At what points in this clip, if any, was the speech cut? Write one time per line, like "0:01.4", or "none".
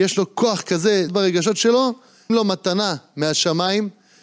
0:01.1
0:02.3